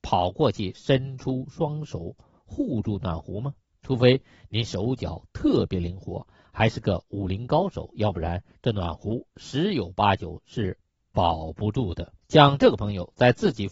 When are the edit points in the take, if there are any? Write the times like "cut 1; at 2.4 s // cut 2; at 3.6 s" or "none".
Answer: cut 1; at 12.2 s